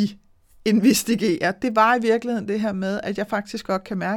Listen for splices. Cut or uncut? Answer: uncut